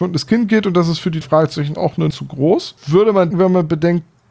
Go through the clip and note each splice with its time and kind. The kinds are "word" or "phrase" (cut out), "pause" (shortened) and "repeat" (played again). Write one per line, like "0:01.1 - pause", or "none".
0:01.2 - word
0:01.8 - word
0:02.1 - word
0:02.8 - pause
0:03.3 - word